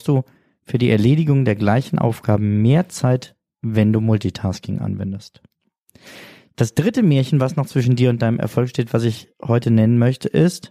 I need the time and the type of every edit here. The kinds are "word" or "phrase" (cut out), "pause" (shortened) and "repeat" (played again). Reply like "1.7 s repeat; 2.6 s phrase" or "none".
none